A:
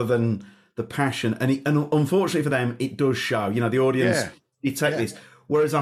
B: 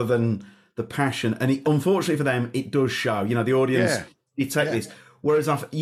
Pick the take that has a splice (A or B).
B